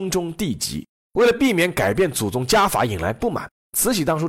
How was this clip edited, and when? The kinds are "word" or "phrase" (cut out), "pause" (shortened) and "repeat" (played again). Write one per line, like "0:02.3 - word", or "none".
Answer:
0:01.0 - pause